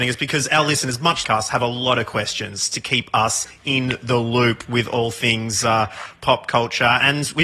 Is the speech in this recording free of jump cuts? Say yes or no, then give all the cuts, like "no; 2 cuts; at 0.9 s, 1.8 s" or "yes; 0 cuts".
no; 1 cut; at 1.2 s